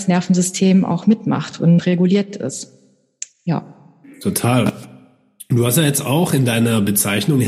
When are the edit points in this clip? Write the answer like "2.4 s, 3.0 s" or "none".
none